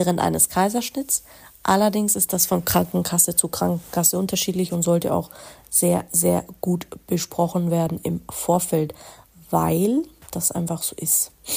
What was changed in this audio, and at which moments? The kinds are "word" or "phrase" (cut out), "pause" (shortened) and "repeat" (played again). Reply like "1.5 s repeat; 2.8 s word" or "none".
none